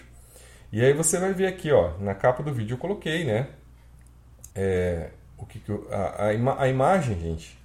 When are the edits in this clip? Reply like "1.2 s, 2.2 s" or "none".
4.5 s